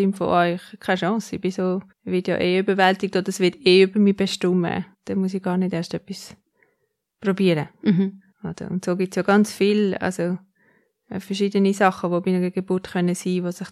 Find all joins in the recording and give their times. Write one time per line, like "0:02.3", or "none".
0:01.9
0:04.9
0:08.3